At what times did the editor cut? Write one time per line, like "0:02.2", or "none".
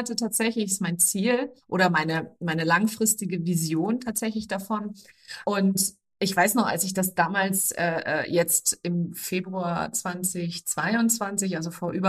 0:01.6